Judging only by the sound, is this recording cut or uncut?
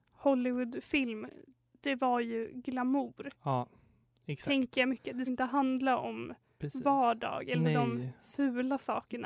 cut